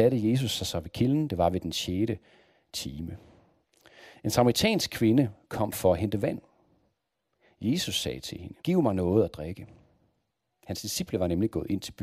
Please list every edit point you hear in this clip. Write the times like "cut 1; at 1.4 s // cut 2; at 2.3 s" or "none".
cut 1; at 8.6 s